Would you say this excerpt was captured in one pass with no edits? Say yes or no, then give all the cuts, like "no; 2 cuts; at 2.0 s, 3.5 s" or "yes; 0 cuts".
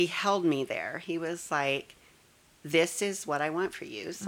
yes; 0 cuts